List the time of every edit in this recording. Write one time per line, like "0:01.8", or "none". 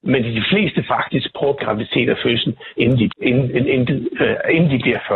0:01.6
0:02.8
0:03.1
0:03.9